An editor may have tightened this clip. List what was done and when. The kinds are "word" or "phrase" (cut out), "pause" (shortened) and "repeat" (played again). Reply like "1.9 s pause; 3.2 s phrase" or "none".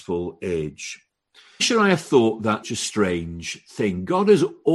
1.6 s word; 2.6 s word